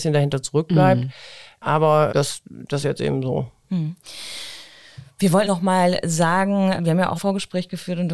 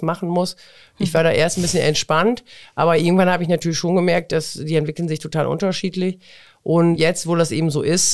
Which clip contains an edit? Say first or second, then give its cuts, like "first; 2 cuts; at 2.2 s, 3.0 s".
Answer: first; 5 cuts; at 2.1 s, 2.8 s, 5.5 s, 6.8 s, 7.2 s